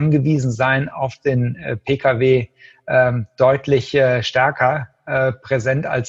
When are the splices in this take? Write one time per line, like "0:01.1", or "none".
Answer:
none